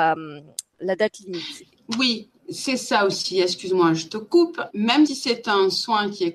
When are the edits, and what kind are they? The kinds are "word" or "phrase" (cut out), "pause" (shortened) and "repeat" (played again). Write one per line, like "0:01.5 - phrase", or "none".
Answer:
0:04.7 - word
0:05.1 - word

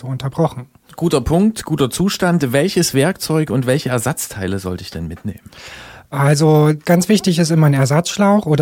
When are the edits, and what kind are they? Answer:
none

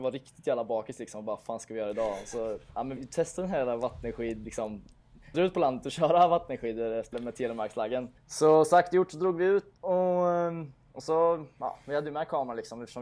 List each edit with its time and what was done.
0:03.0 - word
0:05.3 - phrase
0:07.1 - word
0:08.2 - pause
0:09.8 - pause

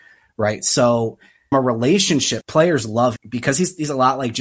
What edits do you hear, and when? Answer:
0:01.5 - word
0:02.4 - word
0:03.2 - word

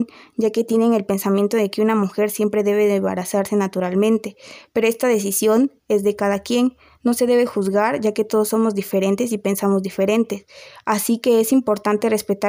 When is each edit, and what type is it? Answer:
none

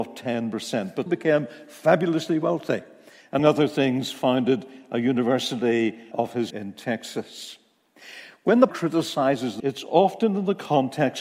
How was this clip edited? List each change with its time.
0:01.1 - word
0:03.4 - word
0:06.1 - word
0:06.5 - word
0:08.7 - word
0:09.6 - word

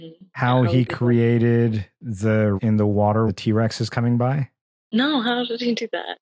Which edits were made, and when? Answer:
0:02.6 - word
0:03.3 - word

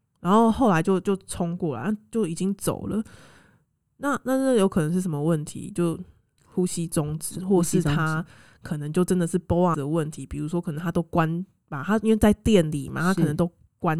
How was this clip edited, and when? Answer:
0:09.7 - word

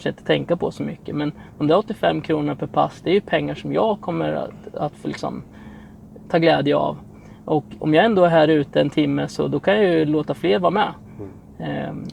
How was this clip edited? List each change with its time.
none

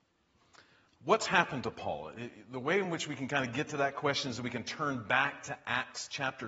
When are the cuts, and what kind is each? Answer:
none

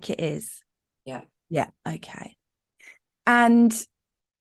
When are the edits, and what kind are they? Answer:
none

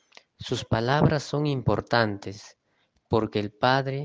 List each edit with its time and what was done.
none

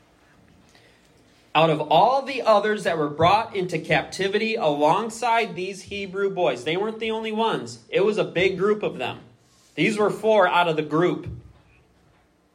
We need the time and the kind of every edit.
none

